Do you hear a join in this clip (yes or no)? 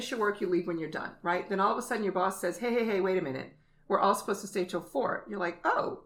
no